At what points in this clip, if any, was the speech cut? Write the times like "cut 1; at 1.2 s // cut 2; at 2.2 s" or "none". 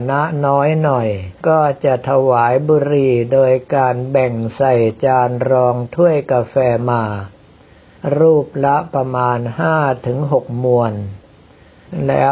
cut 1; at 1.4 s

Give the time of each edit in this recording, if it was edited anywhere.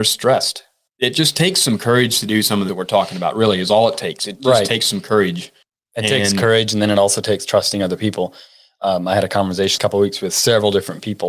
cut 1; at 2.7 s // cut 2; at 5.6 s // cut 3; at 9.8 s

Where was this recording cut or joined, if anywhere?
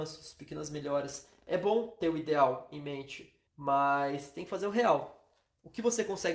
cut 1; at 3.5 s

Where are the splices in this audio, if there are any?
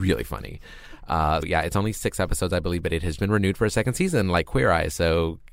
cut 1; at 1.4 s // cut 2; at 3.2 s

